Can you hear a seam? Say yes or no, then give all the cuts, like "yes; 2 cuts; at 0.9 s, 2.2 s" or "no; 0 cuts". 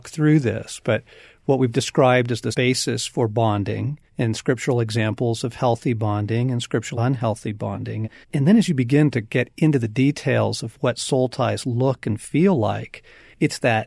yes; 4 cuts; at 2.5 s, 4.1 s, 6.9 s, 8.2 s